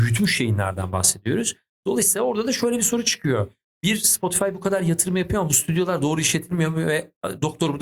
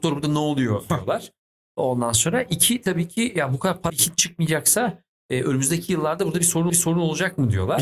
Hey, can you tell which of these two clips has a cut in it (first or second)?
second